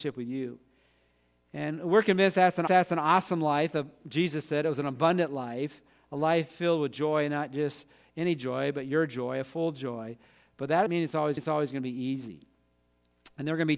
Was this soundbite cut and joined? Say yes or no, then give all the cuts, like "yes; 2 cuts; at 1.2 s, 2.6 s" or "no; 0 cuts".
yes; 3 cuts; at 2.7 s, 10.9 s, 11.4 s